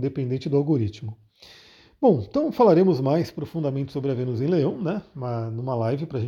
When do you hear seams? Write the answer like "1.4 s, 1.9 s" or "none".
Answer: none